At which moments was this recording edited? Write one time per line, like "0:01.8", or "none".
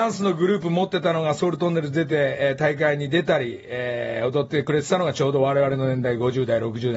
none